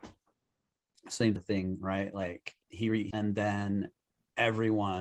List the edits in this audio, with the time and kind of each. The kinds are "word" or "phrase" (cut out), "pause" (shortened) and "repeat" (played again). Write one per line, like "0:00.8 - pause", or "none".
0:01.4 - word
0:02.6 - pause
0:03.1 - phrase